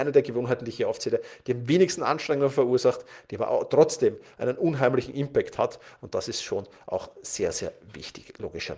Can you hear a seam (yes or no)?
no